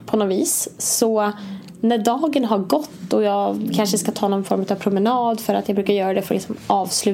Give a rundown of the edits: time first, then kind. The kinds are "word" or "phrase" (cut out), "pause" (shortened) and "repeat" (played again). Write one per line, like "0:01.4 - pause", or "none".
none